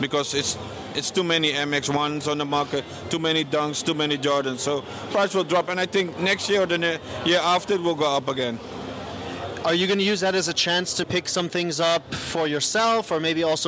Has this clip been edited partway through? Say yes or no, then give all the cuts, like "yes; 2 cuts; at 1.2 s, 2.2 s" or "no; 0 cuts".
yes; 1 cut; at 11.0 s